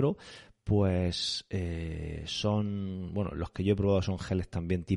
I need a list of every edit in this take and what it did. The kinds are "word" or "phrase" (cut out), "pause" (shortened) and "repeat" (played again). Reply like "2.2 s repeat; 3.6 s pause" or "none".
none